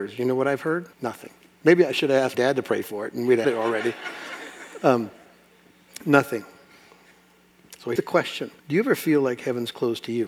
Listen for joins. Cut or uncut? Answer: cut